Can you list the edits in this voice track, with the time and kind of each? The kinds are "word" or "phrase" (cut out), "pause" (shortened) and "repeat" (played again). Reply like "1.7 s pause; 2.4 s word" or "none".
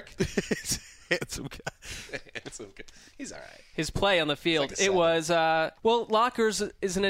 5.8 s pause